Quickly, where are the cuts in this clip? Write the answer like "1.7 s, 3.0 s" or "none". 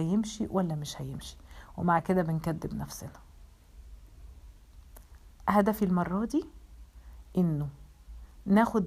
none